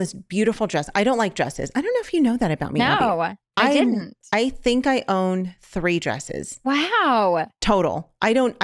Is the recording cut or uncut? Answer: uncut